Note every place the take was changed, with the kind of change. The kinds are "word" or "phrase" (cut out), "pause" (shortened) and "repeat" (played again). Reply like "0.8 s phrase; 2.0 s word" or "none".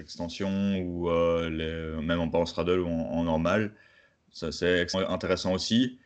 4.9 s word